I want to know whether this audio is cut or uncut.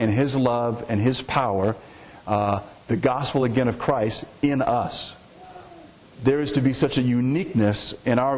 uncut